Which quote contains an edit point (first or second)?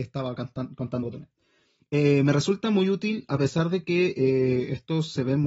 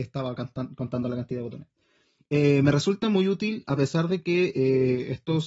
first